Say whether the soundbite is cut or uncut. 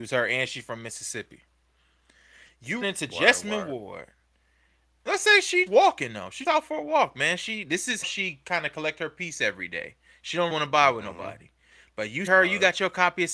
cut